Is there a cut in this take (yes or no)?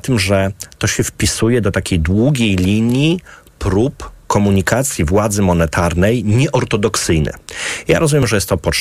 no